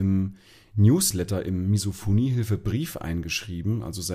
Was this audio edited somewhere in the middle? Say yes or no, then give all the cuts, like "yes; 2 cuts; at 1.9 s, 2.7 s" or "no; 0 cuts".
no; 0 cuts